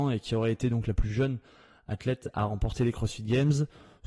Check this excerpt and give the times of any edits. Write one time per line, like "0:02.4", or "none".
none